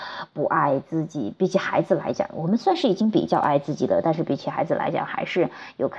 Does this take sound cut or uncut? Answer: uncut